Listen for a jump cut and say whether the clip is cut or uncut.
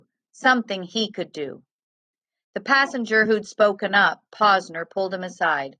uncut